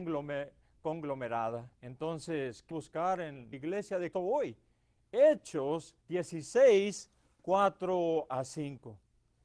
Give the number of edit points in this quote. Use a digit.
5